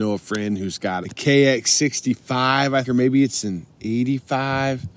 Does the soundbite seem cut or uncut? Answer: cut